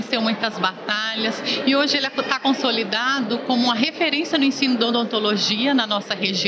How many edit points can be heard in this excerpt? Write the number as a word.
zero